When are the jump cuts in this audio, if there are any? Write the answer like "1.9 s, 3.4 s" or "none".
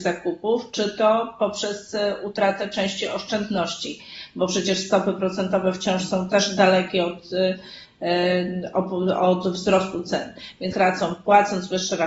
10.7 s